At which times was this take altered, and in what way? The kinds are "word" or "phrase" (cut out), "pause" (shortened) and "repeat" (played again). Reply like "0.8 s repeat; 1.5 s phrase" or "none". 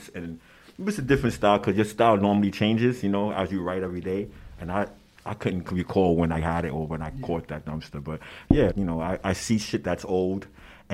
8.7 s word